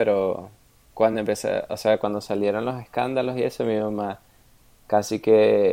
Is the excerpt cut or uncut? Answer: uncut